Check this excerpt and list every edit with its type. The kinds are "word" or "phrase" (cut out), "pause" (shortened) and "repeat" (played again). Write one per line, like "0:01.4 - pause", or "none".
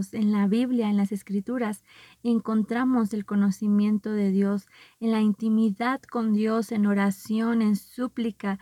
none

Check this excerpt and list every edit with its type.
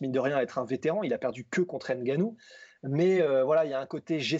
none

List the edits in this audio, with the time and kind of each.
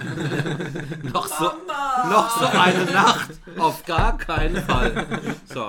none

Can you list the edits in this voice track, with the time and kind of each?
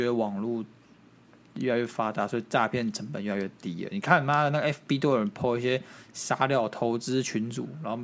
none

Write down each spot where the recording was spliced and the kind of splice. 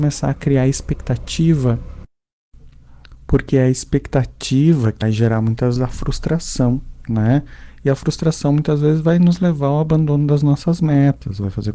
0:05.0 - word
0:05.8 - word

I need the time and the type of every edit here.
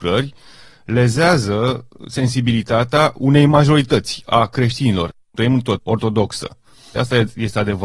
0:05.8 - phrase

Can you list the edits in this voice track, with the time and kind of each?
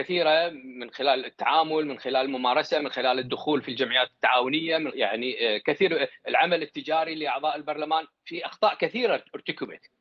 0:04.9 - word
0:08.1 - pause

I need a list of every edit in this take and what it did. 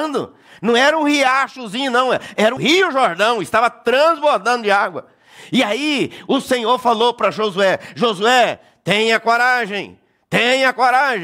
0:02.6 - word

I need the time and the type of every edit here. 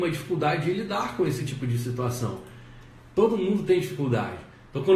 none

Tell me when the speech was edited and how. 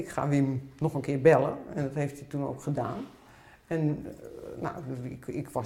none

